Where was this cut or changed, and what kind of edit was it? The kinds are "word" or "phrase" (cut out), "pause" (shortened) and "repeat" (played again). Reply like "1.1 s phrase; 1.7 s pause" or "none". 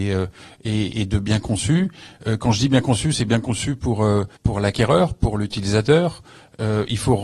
4.4 s pause